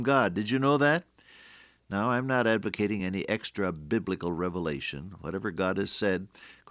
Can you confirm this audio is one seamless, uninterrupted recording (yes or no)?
yes